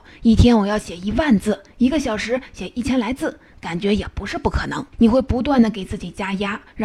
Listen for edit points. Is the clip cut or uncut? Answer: cut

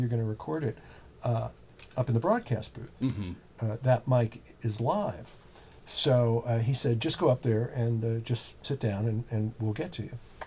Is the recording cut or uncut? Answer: uncut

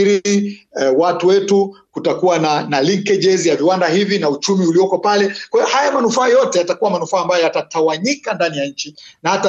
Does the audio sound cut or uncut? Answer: uncut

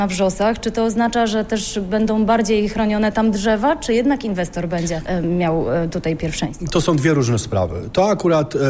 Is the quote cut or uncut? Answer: uncut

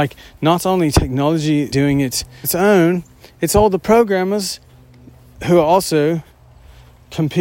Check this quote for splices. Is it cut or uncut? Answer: cut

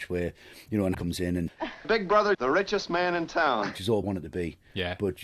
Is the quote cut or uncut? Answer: cut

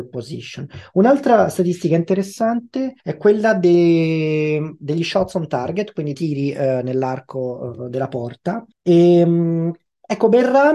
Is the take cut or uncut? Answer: cut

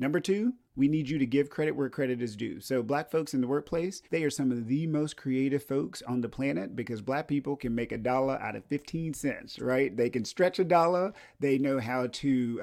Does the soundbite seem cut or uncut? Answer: cut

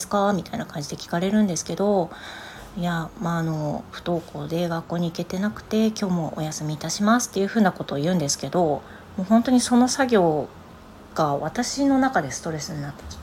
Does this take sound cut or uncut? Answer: uncut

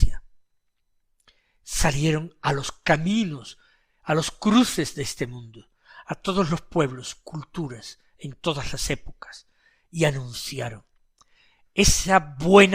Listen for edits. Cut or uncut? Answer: uncut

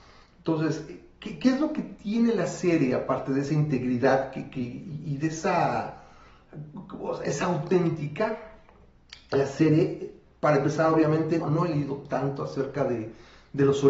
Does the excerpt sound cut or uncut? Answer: cut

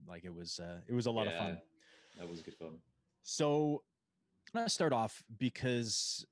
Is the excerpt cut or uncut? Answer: cut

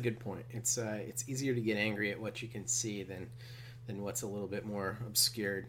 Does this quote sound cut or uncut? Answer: uncut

